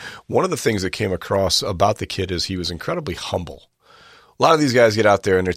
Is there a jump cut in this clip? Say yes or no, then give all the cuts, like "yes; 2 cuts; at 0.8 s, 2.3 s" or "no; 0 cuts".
no; 0 cuts